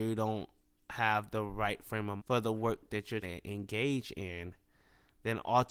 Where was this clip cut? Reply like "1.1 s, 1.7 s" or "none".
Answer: 2.2 s, 3.2 s